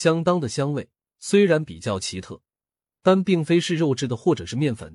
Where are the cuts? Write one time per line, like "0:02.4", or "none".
none